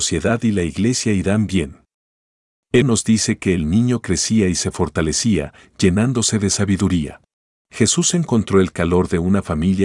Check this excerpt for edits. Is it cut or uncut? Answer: cut